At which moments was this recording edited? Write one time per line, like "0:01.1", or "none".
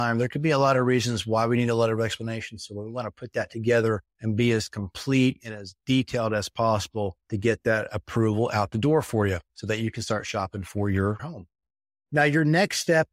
0:09.5